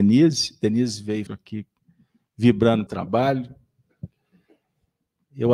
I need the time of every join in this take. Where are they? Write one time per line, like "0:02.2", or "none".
0:01.3
0:02.9